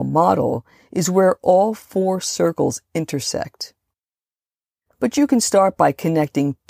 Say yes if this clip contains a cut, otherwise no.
no